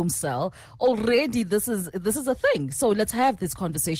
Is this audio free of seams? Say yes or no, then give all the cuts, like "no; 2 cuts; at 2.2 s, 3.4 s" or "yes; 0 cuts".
yes; 0 cuts